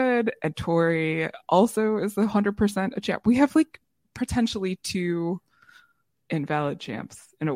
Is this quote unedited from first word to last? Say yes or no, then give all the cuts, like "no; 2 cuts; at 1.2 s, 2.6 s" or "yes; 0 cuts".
yes; 0 cuts